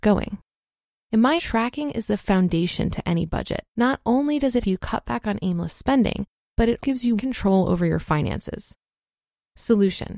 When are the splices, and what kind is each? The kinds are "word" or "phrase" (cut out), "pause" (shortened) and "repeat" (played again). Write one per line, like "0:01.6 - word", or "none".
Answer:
0:01.4 - word
0:03.7 - pause
0:04.6 - word
0:06.8 - word
0:07.2 - word